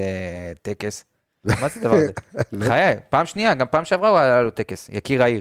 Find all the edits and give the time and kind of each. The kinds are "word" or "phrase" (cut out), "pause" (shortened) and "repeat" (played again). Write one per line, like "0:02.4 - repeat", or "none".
none